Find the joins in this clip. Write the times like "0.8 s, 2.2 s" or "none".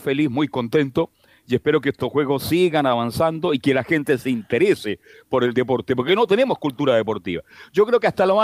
none